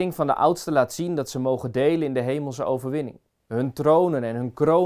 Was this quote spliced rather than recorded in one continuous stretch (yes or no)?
no